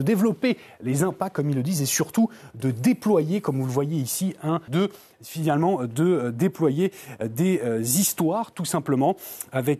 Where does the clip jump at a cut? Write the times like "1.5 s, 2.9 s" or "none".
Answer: 4.7 s